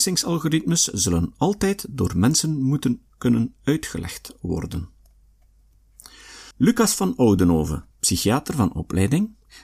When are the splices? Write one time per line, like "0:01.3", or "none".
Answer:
0:06.5
0:07.9